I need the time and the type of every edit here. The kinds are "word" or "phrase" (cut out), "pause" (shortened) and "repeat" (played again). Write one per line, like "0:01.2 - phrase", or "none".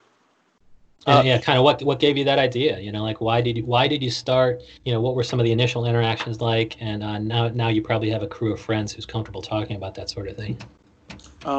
0:04.8 - pause